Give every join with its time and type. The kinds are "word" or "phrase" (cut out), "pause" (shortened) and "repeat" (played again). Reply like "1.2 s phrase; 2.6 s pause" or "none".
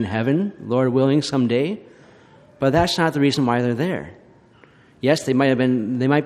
none